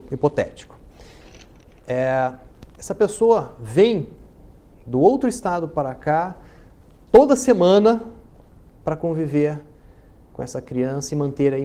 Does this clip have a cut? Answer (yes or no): no